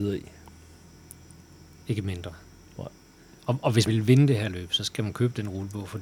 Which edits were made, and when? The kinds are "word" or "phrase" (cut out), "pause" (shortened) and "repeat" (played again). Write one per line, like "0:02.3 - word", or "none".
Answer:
0:03.9 - word